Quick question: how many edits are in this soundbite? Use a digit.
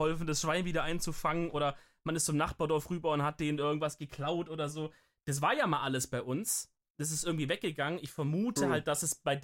0